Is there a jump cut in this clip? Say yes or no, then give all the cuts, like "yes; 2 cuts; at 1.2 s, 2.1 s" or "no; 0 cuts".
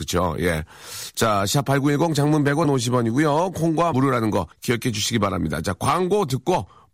yes; 3 cuts; at 2.6 s, 3.9 s, 4.5 s